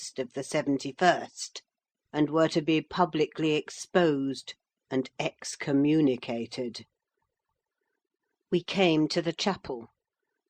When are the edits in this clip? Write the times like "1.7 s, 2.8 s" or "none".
none

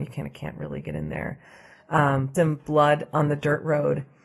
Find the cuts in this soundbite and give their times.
2.3 s

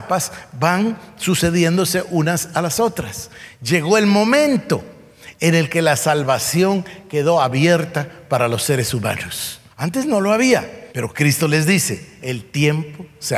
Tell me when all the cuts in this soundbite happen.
9.7 s, 10.9 s

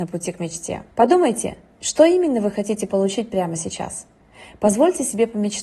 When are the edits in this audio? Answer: 0.9 s

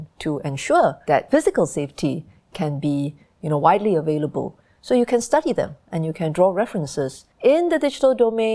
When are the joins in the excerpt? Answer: 7.3 s

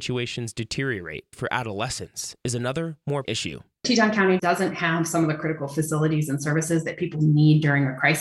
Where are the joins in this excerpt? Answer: 1.3 s, 3.2 s, 4.4 s

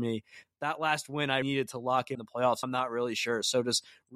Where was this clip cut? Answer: 1.4 s, 2.1 s, 2.6 s

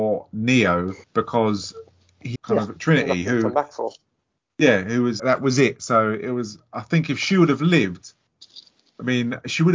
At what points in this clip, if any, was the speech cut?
1.0 s, 2.4 s, 5.2 s

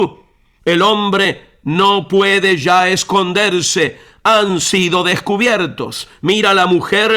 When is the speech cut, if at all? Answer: none

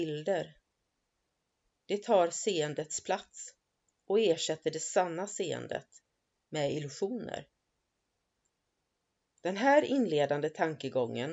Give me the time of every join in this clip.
none

